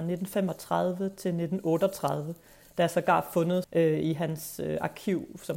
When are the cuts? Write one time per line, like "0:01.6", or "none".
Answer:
0:03.6